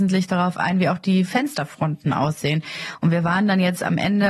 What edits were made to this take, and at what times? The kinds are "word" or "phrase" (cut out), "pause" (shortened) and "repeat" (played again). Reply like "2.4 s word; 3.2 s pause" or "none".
none